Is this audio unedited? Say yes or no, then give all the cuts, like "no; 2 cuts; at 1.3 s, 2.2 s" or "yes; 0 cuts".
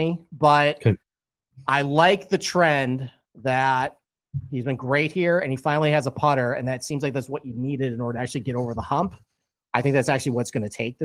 yes; 0 cuts